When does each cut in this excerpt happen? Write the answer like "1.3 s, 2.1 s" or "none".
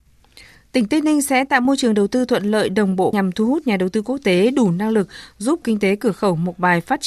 3.1 s, 5.6 s

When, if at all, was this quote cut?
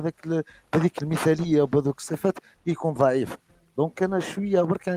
none

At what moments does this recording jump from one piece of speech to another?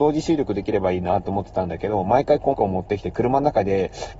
2.5 s

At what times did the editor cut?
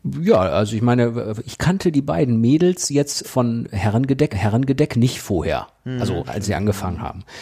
3.2 s, 4.3 s

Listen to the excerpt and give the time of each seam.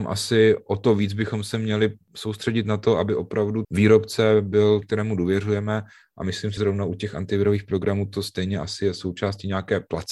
3.6 s, 4.8 s, 6.6 s

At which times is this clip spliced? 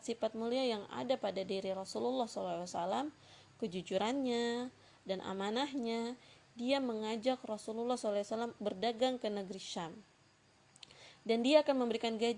8.6 s

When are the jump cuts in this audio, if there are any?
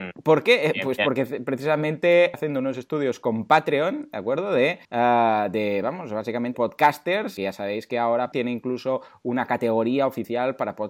2.3 s, 4.8 s, 6.5 s, 7.4 s, 8.3 s

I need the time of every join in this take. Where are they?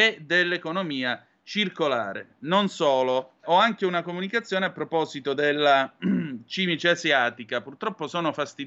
3.4 s

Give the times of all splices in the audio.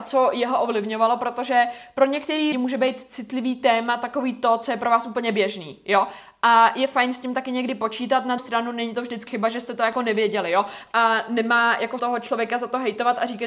2.5 s, 8.4 s, 9.3 s, 12.0 s

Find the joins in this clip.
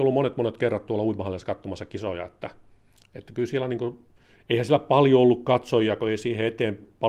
none

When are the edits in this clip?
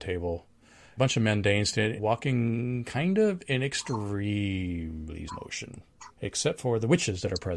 1.0 s, 2.0 s, 5.3 s, 6.1 s

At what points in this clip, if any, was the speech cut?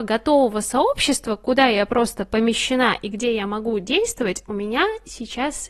none

